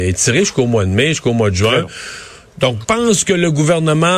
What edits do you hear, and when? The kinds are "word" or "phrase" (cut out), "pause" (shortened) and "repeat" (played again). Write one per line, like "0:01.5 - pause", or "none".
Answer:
0:02.8 - word